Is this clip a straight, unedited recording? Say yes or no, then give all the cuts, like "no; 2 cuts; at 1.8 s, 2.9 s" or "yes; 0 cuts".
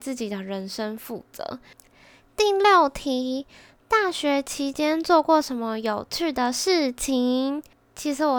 yes; 0 cuts